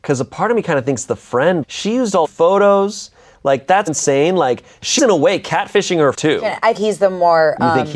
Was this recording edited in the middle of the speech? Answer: yes; 6 cuts; at 1.6 s, 2.2 s, 3.9 s, 5.0 s, 6.1 s, 6.8 s

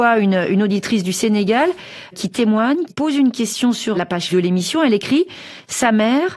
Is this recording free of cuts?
no; 4 cuts; at 2.1 s, 2.9 s, 3.9 s, 4.3 s

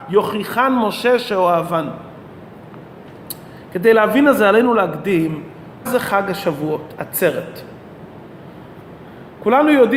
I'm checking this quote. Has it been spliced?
yes; 1 cut; at 5.9 s

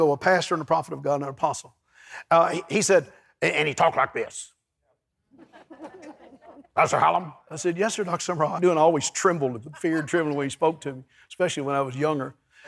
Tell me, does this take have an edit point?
yes; 1 cut; at 8.6 s

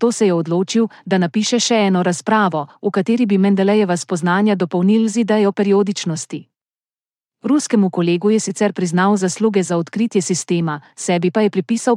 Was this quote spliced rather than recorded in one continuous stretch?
no; 0 cuts

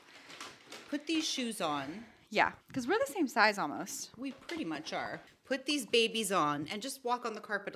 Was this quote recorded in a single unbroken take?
no; 1 cut; at 2.6 s

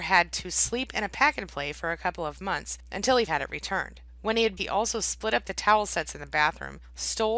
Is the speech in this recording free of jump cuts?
no; 2 cuts; at 3.3 s, 4.6 s

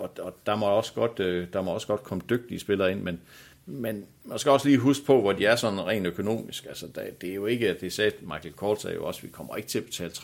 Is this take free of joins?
yes; 0 cuts

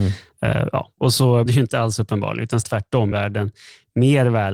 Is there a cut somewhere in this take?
yes; 3 cuts; at 1.5 s, 2.6 s, 3.1 s

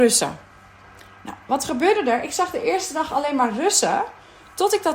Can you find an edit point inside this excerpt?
no; 0 cuts

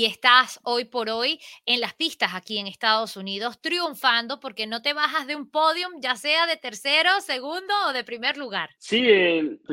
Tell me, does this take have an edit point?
no; 0 cuts

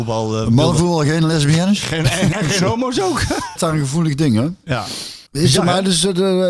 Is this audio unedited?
no; 3 cuts; at 2.3 s, 3.6 s, 5.3 s

